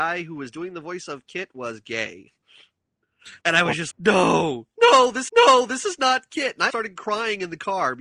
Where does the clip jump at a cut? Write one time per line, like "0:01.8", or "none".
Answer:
0:03.4
0:03.9
0:05.3
0:06.7